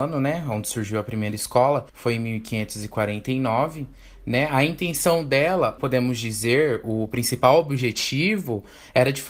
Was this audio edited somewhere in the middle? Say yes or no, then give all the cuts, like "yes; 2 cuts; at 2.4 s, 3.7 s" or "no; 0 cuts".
yes; 2 cuts; at 1.9 s, 5.8 s